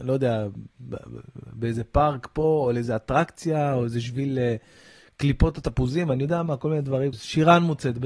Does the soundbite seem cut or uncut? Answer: cut